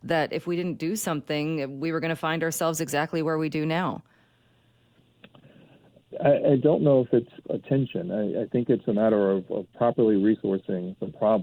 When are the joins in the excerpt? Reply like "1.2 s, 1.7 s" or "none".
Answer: 7.4 s